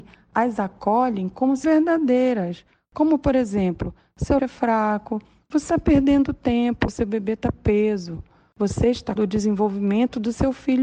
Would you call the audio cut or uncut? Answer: cut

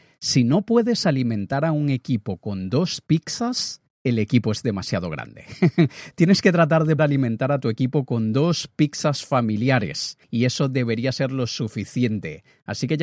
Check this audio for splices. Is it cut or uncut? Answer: cut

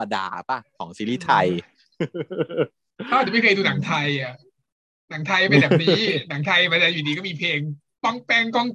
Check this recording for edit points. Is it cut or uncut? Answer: uncut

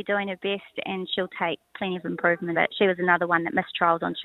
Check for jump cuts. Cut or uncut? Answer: cut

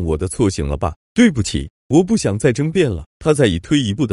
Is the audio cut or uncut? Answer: cut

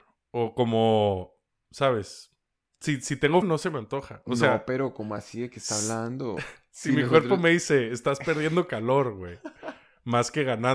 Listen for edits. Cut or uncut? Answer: cut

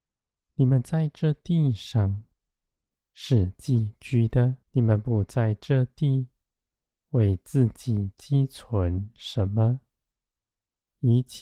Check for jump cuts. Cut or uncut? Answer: cut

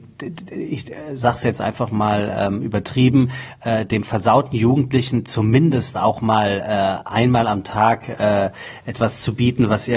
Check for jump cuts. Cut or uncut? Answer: uncut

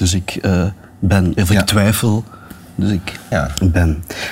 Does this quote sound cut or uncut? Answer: cut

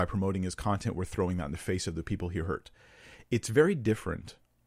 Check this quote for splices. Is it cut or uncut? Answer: uncut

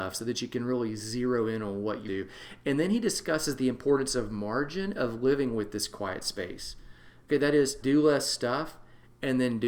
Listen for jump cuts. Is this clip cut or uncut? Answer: cut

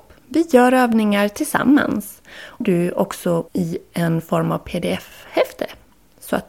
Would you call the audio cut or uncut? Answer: cut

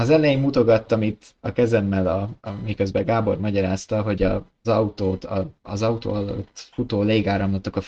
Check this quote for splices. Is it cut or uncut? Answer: cut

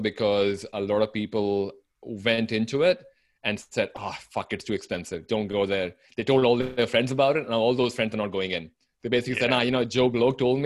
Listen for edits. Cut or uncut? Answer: uncut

